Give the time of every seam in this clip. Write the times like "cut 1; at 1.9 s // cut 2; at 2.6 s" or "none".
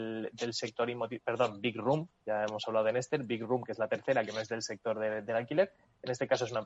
none